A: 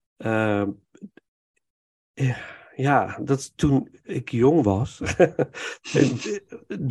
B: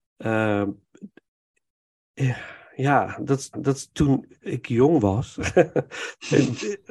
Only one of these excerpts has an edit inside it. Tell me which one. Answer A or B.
B